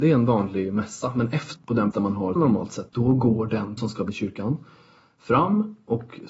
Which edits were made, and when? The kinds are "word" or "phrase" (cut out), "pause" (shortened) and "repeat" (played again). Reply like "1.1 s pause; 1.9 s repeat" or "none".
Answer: 1.6 s word; 1.9 s word; 2.4 s word; 2.9 s word; 3.8 s word; 4.1 s word